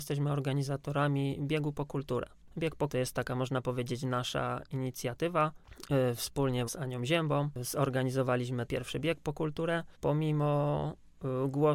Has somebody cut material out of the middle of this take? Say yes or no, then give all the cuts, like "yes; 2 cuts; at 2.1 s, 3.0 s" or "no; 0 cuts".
yes; 4 cuts; at 2.9 s, 6.7 s, 8.7 s, 9.9 s